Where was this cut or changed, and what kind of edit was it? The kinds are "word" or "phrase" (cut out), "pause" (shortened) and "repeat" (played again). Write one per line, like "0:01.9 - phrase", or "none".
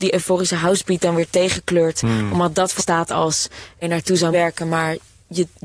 0:02.8 - word
0:03.8 - phrase
0:04.3 - word